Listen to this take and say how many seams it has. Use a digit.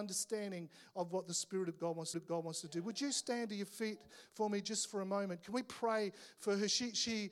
1